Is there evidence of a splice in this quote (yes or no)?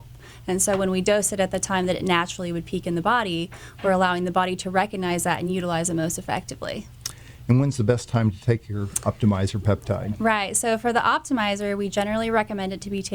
no